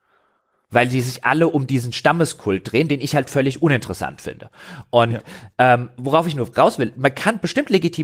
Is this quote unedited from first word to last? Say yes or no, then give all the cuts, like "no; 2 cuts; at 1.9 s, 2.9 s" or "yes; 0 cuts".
yes; 0 cuts